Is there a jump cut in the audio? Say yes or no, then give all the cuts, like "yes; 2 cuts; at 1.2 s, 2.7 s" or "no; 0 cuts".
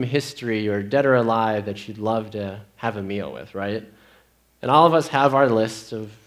no; 0 cuts